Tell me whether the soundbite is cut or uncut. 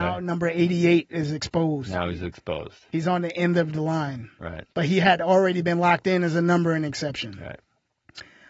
cut